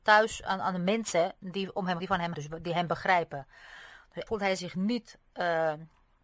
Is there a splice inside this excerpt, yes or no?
yes